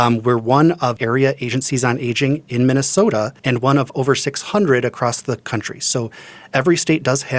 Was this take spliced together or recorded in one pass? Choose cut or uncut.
cut